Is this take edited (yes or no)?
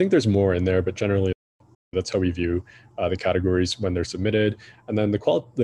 no